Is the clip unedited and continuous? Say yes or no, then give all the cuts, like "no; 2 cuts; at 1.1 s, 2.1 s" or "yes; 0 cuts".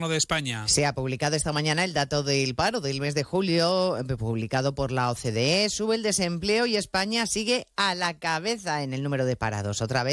yes; 0 cuts